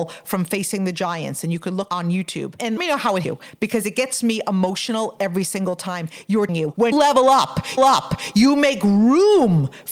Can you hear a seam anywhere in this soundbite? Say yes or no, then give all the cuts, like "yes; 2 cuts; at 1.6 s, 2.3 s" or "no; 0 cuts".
yes; 5 cuts; at 2.8 s, 3.2 s, 6.5 s, 6.9 s, 7.8 s